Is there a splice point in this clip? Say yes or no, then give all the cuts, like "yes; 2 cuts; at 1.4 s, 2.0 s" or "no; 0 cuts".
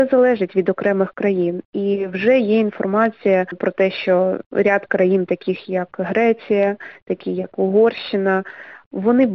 no; 0 cuts